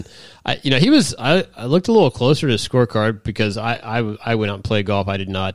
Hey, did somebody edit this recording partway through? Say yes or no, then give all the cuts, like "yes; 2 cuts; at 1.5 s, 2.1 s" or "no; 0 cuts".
no; 0 cuts